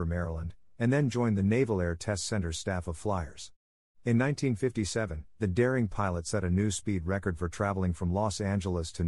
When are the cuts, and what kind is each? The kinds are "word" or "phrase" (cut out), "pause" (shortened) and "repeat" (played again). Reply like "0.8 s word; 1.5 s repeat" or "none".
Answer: none